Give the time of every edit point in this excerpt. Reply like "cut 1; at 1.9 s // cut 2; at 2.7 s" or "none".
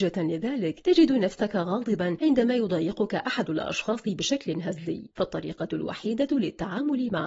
none